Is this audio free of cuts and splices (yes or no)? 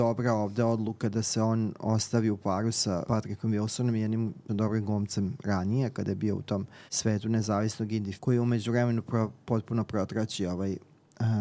no